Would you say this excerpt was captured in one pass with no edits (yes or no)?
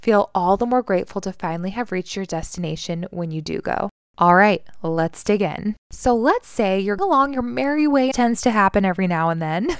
no